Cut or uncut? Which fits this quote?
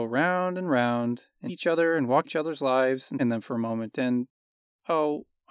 cut